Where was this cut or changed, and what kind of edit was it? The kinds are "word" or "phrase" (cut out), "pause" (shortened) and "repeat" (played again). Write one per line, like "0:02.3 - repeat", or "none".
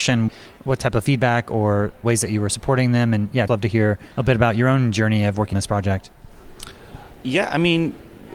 0:03.5 - word
0:04.1 - pause
0:05.5 - word

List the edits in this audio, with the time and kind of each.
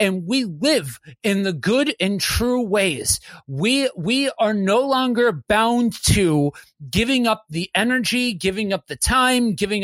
none

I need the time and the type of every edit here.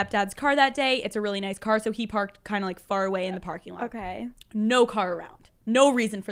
none

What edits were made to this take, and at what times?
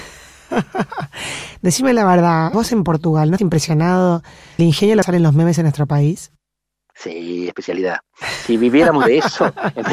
0:02.5 - word
0:03.4 - word
0:04.6 - word
0:05.0 - phrase
0:06.6 - pause
0:07.5 - word

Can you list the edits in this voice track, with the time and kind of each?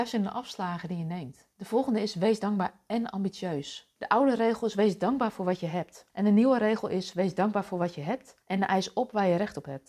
0:01.5 - pause
0:04.0 - pause
0:06.1 - pause
0:08.4 - pause

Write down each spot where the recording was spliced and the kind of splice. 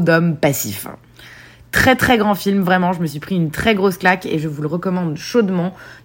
none

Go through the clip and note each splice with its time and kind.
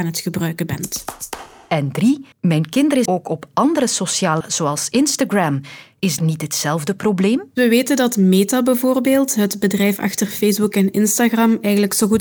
0:02.3 - pause
0:03.1 - word
0:04.4 - word
0:06.2 - word

